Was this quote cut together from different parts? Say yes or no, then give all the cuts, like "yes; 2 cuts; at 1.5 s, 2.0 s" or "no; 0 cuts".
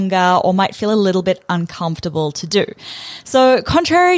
no; 0 cuts